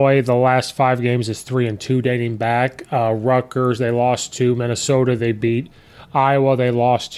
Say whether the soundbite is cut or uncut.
uncut